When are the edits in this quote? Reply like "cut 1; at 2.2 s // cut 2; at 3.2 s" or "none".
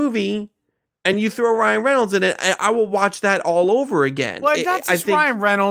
none

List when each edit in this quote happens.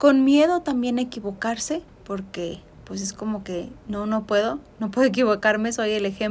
cut 1; at 1.9 s

